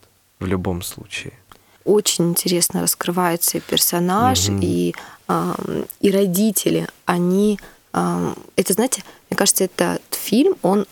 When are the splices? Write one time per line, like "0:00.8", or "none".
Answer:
none

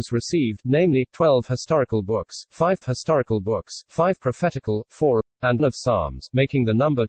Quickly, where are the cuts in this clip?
0:02.8
0:05.2
0:05.6

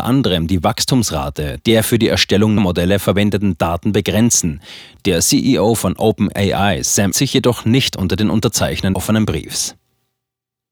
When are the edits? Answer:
0:02.6
0:07.1
0:08.9

